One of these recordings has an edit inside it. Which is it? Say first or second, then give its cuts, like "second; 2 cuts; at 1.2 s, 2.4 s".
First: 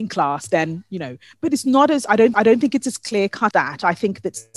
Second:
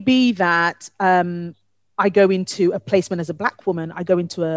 first; 2 cuts; at 2.3 s, 3.5 s